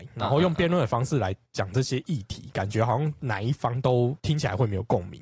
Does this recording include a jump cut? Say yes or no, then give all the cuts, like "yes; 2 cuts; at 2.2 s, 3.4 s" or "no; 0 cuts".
yes; 1 cut; at 4.2 s